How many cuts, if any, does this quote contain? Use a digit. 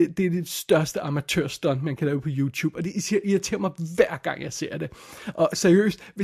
0